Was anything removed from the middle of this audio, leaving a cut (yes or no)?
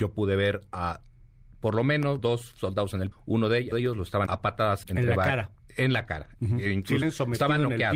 yes